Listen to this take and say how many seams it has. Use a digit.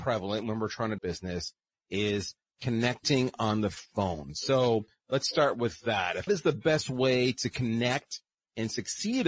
2